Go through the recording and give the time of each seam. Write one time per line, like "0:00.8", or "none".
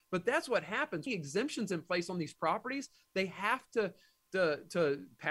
0:01.1